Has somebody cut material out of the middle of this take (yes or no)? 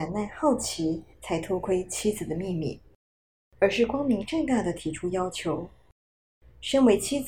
yes